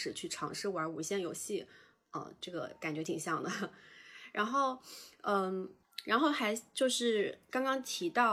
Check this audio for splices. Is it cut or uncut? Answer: uncut